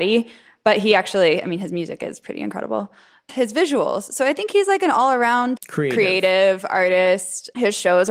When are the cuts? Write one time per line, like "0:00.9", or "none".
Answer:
0:03.3
0:05.6

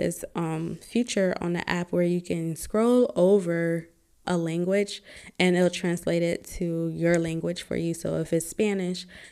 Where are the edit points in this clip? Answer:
0:04.2

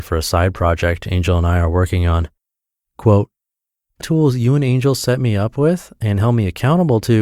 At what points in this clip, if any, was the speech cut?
0:04.0

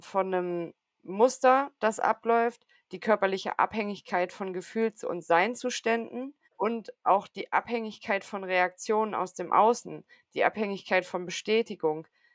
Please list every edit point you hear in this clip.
0:06.4

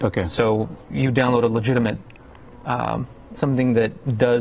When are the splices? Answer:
0:03.4

